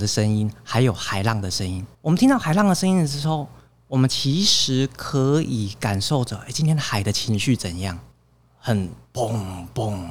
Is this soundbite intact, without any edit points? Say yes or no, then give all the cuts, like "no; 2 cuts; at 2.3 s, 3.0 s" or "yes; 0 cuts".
no; 2 cuts; at 1.9 s, 8.1 s